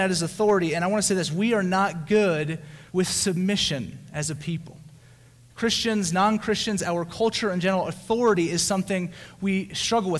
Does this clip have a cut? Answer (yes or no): yes